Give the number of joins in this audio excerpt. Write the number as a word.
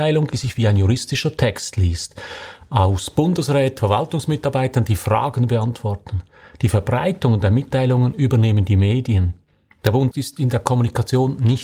three